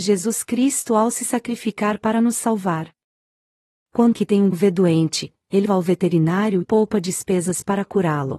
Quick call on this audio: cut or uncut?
cut